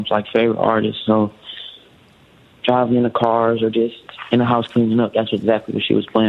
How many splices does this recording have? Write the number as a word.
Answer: zero